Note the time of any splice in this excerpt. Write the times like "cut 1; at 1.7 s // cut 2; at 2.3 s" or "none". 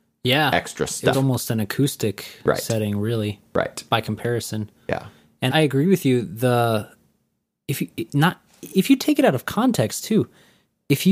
cut 1; at 1.1 s // cut 2; at 5.5 s